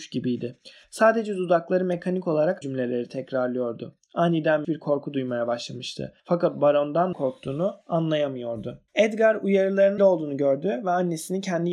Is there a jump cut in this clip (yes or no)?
yes